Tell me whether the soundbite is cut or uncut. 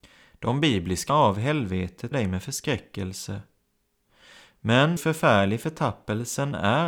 cut